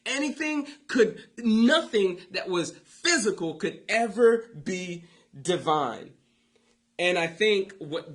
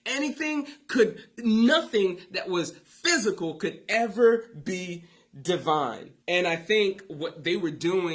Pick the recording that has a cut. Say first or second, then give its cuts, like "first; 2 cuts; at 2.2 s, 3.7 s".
second; 1 cut; at 6.2 s